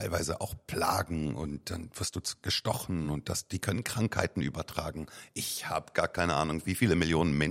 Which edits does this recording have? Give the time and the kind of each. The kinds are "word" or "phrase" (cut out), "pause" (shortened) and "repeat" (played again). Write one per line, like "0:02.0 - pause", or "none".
none